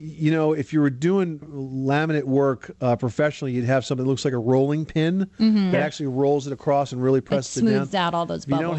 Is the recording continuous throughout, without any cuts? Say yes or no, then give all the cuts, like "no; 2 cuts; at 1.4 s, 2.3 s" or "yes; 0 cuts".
no; 1 cut; at 1.4 s